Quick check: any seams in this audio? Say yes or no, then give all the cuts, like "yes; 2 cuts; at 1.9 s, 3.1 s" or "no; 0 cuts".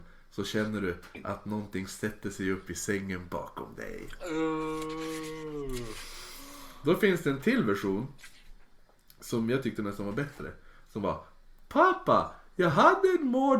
no; 0 cuts